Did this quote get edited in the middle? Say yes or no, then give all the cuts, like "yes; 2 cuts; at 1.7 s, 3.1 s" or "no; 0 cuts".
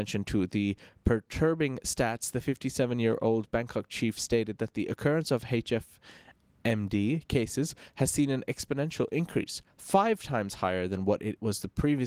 no; 0 cuts